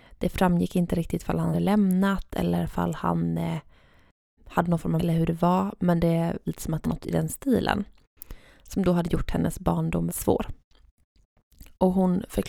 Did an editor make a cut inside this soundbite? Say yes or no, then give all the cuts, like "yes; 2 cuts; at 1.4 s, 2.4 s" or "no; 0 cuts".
yes; 6 cuts; at 1.5 s, 4.4 s, 5.0 s, 6.5 s, 6.8 s, 10.1 s